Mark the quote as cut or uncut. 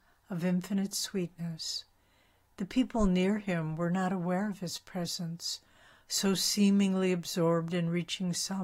uncut